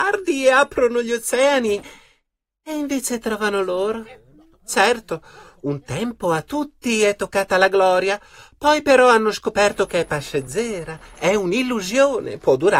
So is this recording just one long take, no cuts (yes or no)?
yes